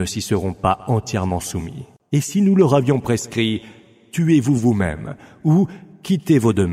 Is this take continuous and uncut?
yes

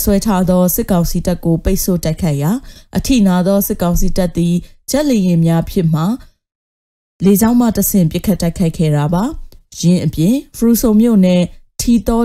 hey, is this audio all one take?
yes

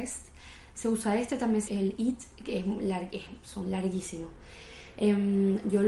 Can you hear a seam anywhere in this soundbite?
yes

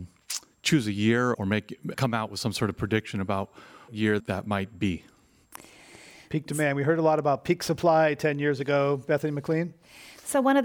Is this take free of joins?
no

